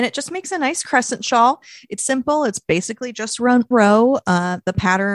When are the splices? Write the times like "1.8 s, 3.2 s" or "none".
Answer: 2.0 s, 3.7 s